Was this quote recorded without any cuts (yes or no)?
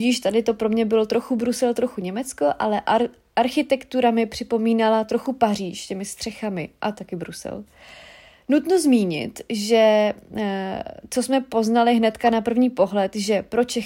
yes